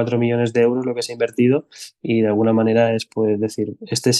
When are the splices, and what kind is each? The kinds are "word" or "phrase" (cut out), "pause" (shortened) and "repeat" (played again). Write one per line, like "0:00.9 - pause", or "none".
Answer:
none